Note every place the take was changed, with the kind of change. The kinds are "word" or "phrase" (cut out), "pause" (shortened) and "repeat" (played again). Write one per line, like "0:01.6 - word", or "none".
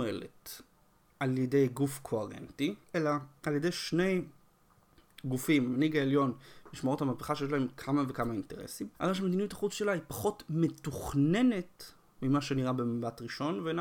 0:02.8 - pause
0:08.9 - pause